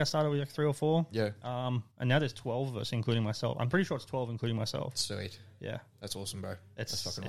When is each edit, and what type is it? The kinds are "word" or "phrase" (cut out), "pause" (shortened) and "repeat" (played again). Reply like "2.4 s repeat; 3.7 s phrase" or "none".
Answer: 1.9 s pause